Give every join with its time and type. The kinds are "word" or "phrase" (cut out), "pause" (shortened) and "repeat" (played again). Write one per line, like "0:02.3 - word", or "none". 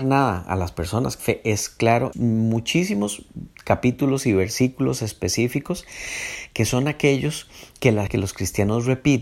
0:01.2 - word
0:02.1 - word
0:08.1 - word